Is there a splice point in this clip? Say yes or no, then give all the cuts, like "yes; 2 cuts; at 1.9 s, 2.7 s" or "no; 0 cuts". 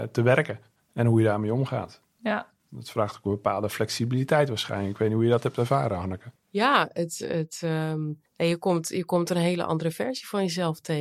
no; 0 cuts